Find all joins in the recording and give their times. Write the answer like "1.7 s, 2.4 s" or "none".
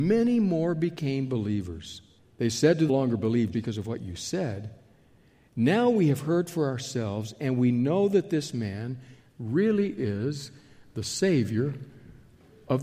2.2 s, 2.9 s, 3.5 s